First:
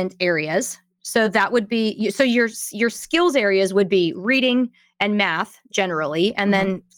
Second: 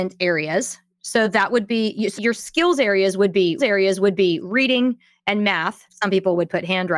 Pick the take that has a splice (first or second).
second